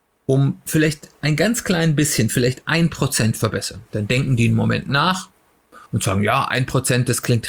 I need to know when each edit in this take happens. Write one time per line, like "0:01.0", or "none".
0:03.9
0:05.9